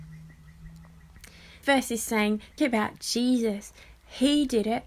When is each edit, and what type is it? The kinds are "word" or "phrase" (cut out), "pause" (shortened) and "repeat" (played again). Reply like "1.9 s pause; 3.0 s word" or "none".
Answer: 1.6 s word; 2.6 s word